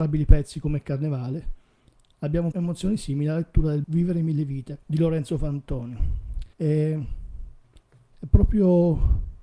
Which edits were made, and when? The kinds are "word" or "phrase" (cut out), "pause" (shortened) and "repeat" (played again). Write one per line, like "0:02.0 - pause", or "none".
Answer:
0:02.5 - word
0:03.8 - word
0:04.8 - pause
0:06.5 - pause